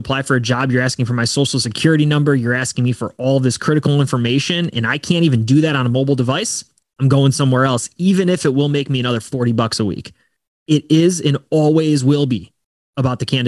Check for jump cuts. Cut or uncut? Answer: uncut